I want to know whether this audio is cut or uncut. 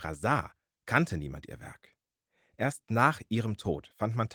uncut